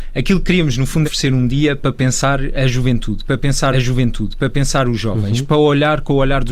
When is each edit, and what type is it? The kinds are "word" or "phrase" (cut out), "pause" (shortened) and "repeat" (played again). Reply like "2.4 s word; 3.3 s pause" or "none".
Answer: 1.0 s word; 3.7 s repeat